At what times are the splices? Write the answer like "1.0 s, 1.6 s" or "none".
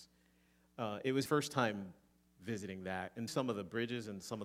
1.3 s, 3.3 s